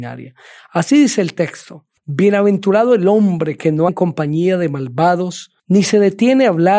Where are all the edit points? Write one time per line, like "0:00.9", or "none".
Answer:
0:02.0
0:03.9
0:05.6